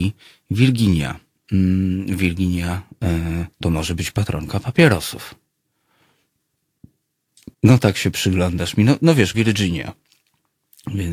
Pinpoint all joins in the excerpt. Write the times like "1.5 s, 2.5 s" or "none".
3.5 s, 7.5 s, 9.3 s